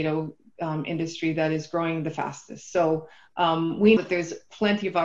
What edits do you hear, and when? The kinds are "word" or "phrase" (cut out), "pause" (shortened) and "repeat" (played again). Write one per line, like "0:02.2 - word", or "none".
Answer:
0:04.0 - word